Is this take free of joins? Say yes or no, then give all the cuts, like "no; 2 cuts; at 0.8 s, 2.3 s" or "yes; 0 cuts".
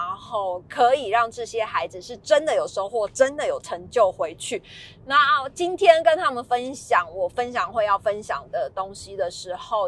yes; 0 cuts